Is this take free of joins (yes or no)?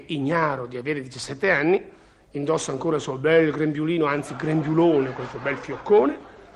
yes